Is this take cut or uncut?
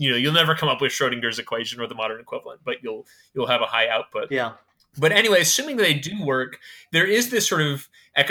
uncut